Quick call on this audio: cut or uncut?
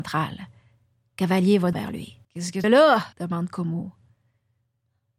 cut